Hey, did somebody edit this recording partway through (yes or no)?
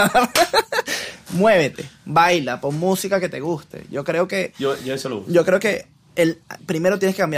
no